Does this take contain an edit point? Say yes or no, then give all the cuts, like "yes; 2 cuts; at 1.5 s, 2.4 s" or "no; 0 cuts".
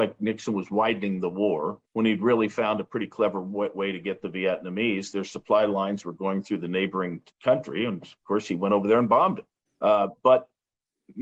yes; 3 cuts; at 1.8 s, 7.3 s, 9.7 s